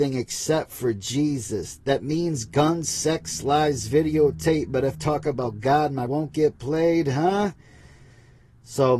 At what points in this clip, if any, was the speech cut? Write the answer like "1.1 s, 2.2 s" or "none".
4.9 s, 6.1 s